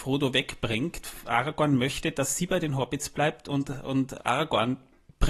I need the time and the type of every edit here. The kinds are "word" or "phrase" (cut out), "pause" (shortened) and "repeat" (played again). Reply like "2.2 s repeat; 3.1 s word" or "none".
4.2 s word